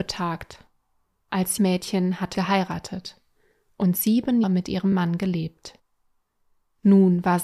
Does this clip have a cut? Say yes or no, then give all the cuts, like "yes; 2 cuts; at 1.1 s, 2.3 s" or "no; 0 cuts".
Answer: yes; 3 cuts; at 1.6 s, 2.3 s, 4.4 s